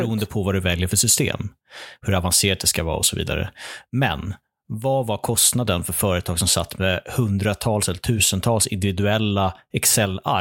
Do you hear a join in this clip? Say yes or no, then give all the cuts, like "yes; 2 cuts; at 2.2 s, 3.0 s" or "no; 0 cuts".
no; 0 cuts